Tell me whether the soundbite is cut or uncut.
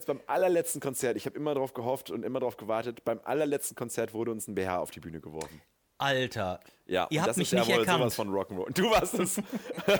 uncut